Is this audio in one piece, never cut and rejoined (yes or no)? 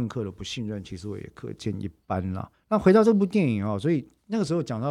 no